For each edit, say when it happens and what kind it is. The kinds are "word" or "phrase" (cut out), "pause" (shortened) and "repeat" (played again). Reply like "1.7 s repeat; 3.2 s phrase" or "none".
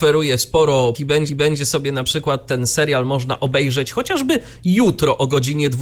0.9 s word; 1.3 s repeat